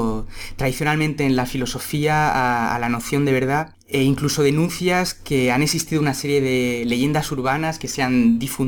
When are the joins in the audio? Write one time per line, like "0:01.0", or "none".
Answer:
none